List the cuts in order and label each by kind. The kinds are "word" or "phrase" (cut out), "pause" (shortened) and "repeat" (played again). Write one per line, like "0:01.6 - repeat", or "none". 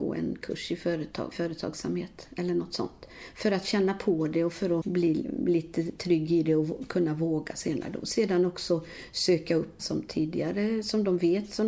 0:01.3 - word
0:04.8 - word
0:09.8 - word